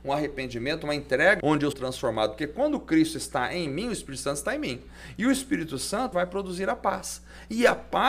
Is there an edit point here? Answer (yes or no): yes